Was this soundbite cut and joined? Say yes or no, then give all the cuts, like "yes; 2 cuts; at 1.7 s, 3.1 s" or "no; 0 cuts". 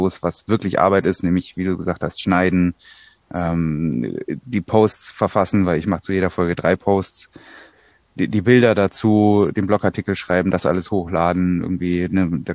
no; 0 cuts